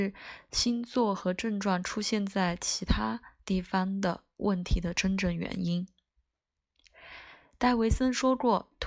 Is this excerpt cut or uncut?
uncut